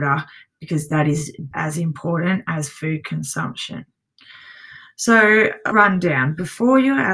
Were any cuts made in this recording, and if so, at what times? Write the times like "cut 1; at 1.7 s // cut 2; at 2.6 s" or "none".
cut 1; at 1.5 s // cut 2; at 5.7 s